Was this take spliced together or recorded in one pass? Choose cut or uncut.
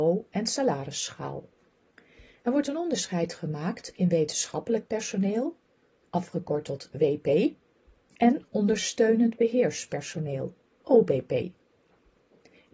uncut